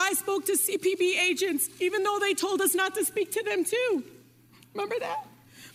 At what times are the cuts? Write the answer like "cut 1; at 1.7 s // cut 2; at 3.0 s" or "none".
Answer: none

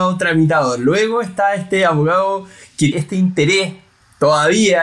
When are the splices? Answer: cut 1; at 2.9 s

